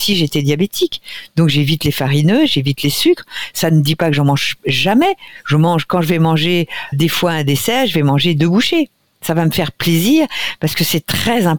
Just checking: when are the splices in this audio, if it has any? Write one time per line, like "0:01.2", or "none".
0:06.9